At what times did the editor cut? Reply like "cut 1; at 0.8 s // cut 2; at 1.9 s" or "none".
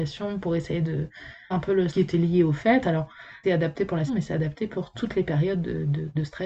cut 1; at 1.5 s // cut 2; at 1.9 s // cut 3; at 3.4 s // cut 4; at 4.1 s